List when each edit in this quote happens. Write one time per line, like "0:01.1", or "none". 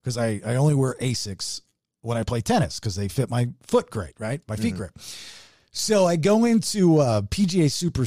none

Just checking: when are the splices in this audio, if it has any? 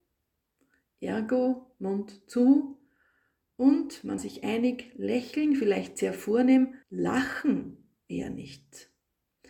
0:04.2
0:06.8

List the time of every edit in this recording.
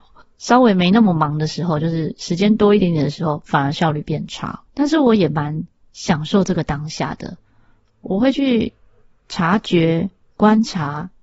0:04.7

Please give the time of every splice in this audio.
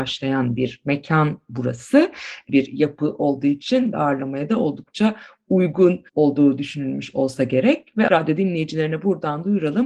0:02.5
0:03.9
0:06.1
0:08.1

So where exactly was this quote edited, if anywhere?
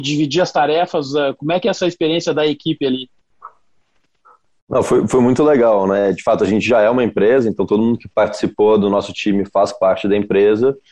none

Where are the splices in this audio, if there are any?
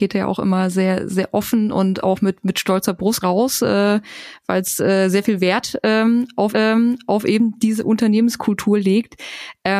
0:03.2
0:06.5

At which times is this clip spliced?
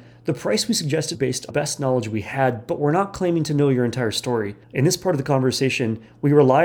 0:01.1
0:01.5
0:04.6

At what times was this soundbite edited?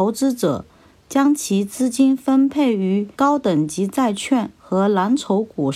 0:03.1

